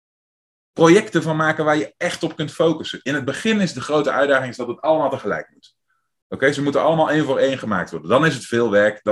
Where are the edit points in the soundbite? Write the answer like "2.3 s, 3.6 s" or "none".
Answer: none